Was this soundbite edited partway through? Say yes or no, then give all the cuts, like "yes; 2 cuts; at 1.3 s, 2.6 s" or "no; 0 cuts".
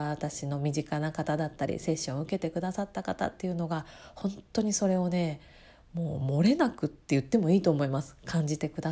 no; 0 cuts